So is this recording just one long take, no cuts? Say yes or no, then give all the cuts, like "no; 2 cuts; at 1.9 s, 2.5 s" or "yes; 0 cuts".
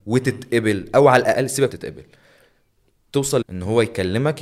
no; 2 cuts; at 1.7 s, 3.4 s